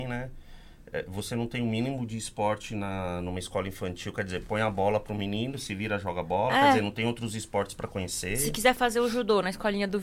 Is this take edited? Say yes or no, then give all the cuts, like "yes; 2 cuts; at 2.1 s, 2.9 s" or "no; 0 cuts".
no; 0 cuts